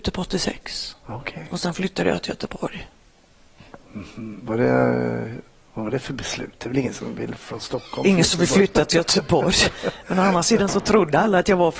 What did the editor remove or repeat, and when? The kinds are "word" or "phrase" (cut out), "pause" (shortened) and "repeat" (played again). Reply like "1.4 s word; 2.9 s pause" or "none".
none